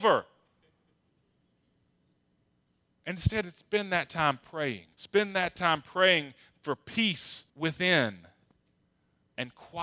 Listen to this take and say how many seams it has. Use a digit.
2